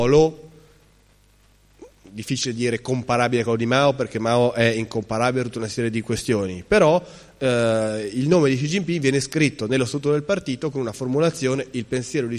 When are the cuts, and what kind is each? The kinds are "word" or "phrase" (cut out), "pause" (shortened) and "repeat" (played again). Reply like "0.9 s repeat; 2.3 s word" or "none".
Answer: none